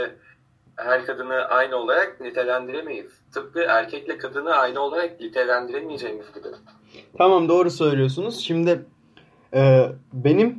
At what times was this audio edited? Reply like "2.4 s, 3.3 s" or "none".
3.3 s